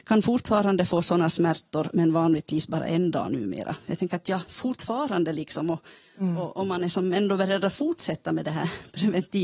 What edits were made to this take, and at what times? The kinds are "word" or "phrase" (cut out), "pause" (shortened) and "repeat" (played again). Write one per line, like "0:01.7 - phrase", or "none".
none